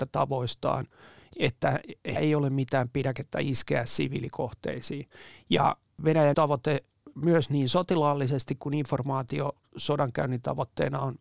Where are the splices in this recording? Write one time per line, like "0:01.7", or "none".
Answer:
0:02.2
0:06.3